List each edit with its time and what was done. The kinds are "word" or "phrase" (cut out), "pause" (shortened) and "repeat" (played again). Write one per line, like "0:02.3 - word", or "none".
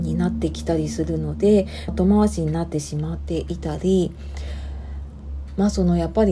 0:01.9 - phrase